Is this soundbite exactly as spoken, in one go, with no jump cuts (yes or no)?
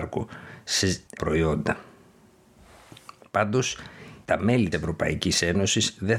no